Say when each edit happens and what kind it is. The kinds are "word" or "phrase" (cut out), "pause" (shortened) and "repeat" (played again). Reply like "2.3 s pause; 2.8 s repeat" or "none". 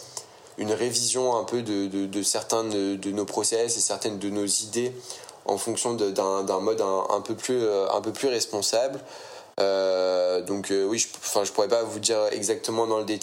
none